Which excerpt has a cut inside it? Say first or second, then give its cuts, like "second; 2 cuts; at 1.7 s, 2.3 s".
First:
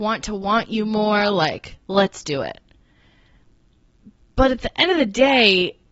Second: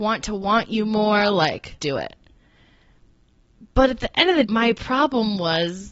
second; 3 cuts; at 1.8 s, 3.7 s, 4.4 s